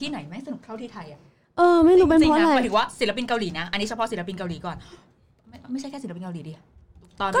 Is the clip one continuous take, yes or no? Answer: yes